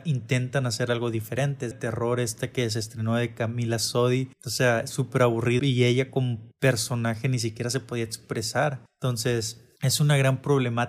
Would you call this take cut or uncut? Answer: cut